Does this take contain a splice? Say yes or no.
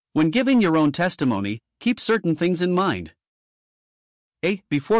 no